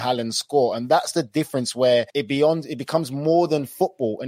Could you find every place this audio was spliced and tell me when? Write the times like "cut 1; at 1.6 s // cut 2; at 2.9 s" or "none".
cut 1; at 2.1 s